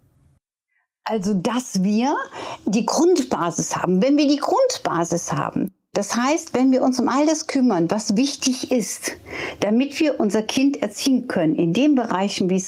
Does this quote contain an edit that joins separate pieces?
no; 0 cuts

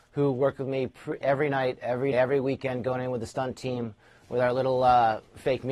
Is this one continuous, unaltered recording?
no; 2 cuts; at 1.2 s, 2.1 s

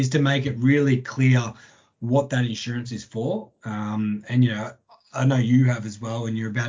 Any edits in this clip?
no; 0 cuts

